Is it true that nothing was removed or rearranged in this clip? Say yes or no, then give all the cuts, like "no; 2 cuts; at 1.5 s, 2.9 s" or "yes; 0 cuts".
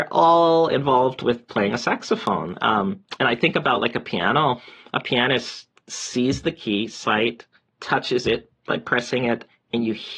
yes; 0 cuts